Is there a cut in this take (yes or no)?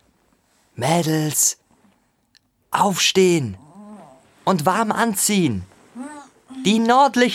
no